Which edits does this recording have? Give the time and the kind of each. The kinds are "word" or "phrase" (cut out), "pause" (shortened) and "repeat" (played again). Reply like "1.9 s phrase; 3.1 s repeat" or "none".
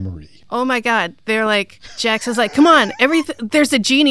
none

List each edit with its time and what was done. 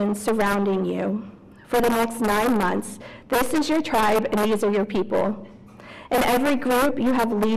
none

